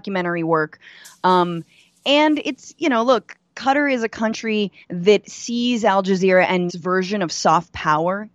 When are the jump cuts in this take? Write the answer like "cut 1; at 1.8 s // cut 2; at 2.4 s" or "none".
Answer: cut 1; at 4.8 s // cut 2; at 6.7 s